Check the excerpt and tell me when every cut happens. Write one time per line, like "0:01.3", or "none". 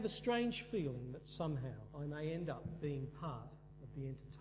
0:01.9